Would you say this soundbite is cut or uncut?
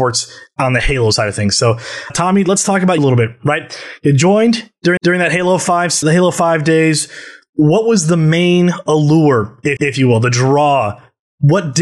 cut